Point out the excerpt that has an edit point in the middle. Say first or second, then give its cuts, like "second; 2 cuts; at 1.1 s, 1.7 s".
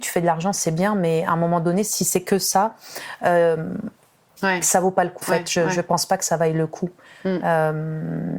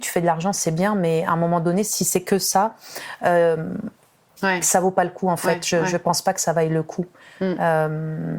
first; 1 cut; at 5.2 s